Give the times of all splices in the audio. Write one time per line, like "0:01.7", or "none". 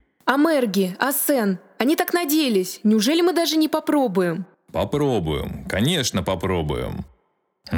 0:04.5